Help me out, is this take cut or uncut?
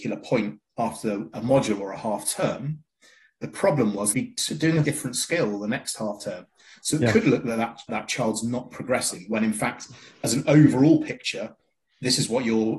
cut